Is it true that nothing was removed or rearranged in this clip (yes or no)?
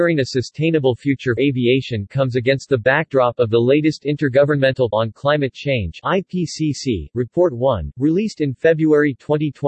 no